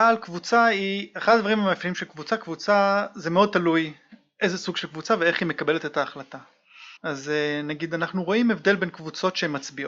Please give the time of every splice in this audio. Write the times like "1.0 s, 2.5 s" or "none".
7.0 s